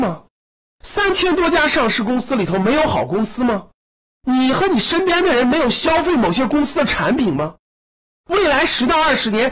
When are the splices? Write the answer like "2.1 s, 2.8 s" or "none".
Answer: none